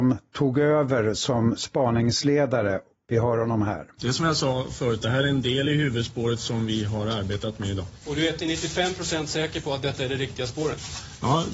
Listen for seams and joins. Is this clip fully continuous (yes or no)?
yes